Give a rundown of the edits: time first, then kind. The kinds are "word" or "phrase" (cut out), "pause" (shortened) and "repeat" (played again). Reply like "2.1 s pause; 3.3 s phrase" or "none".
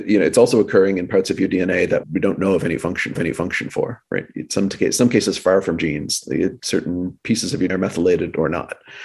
2.0 s word; 3.2 s repeat; 6.6 s word; 7.7 s word